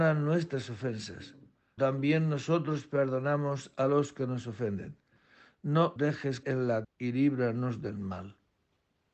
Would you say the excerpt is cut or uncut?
cut